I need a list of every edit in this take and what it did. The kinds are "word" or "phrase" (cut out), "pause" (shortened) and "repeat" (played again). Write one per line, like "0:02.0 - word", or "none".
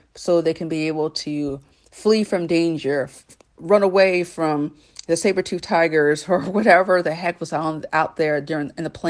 none